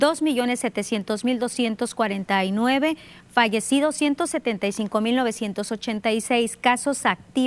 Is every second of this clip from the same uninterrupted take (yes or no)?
yes